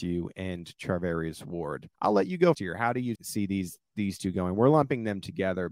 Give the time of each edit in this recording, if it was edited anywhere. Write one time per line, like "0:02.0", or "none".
0:01.9
0:02.5
0:03.2